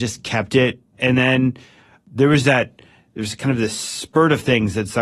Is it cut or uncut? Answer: uncut